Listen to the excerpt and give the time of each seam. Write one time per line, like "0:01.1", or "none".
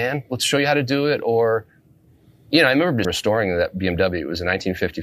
0:03.0